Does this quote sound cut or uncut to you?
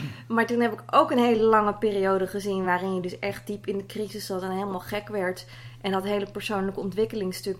uncut